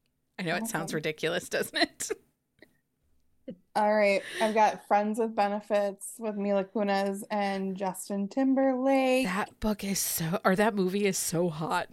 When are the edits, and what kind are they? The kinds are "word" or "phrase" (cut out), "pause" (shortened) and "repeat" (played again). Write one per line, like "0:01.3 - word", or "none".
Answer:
none